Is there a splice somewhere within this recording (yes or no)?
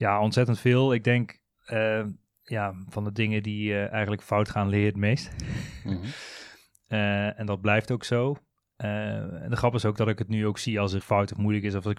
yes